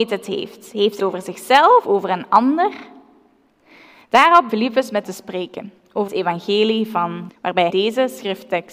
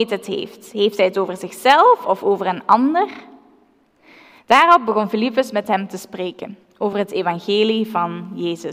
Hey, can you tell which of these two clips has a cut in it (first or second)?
first